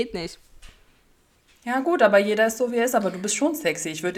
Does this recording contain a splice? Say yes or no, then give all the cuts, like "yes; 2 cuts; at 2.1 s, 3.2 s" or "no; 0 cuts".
no; 0 cuts